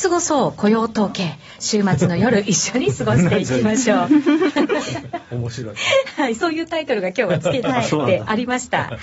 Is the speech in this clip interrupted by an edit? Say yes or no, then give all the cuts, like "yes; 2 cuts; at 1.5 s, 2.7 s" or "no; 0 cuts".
no; 0 cuts